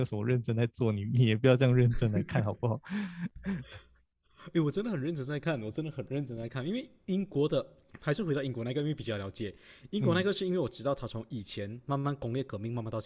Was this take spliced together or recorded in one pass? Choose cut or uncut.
uncut